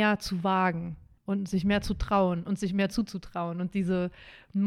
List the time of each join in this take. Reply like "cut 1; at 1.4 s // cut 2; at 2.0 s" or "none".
cut 1; at 1.2 s